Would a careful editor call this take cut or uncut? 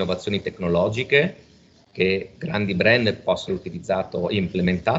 cut